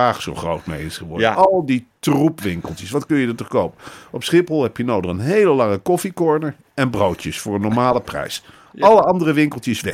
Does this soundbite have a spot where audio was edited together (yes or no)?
no